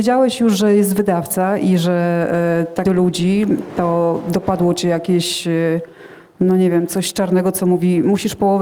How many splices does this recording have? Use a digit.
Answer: 1